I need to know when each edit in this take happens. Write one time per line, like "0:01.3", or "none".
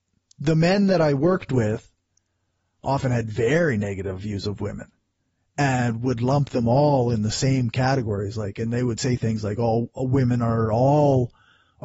none